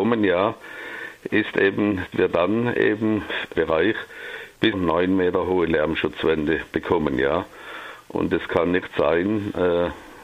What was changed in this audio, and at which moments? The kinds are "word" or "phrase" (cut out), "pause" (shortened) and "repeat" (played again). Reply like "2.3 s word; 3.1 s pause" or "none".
2.1 s phrase; 3.5 s phrase; 4.7 s word